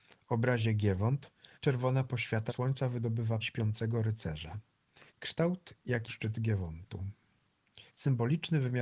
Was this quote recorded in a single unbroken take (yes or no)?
no